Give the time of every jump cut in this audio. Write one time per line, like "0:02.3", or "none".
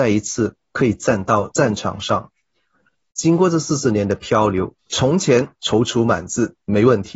0:04.8